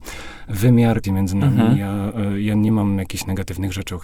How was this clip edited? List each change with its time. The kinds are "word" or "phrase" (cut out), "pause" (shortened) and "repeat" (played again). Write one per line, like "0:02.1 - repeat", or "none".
0:01.0 - word